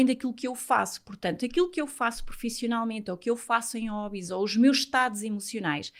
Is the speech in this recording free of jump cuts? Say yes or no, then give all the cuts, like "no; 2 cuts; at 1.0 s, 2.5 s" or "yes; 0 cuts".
yes; 0 cuts